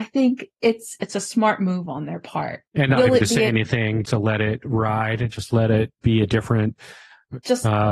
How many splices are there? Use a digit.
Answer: 2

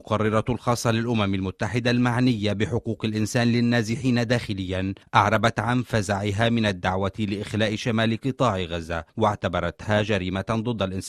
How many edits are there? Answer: 0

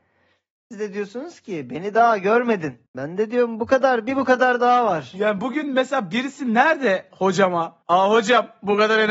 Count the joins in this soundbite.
2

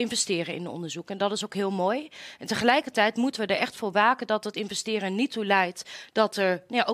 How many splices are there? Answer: 0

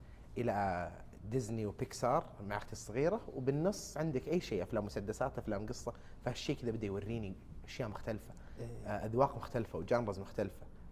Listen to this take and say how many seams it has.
0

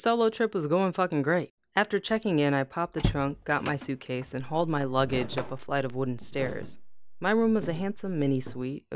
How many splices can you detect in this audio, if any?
1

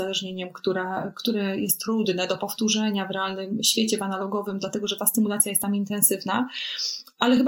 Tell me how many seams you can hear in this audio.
0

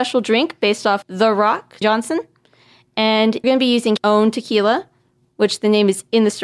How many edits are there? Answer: 4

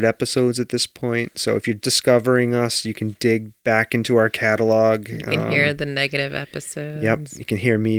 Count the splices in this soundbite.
2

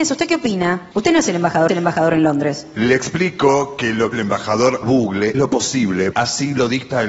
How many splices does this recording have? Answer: 6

